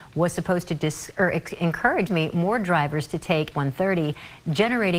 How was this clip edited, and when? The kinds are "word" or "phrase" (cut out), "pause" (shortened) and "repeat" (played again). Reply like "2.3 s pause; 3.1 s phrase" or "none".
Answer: 2.1 s word; 3.5 s word